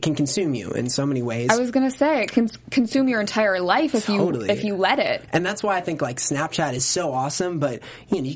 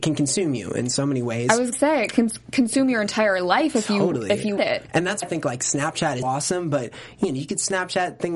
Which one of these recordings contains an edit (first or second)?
second